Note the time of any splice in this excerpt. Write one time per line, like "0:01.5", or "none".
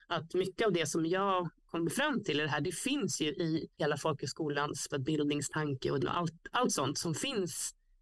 0:03.7
0:04.9
0:06.0